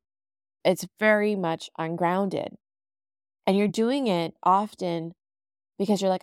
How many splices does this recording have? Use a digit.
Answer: 0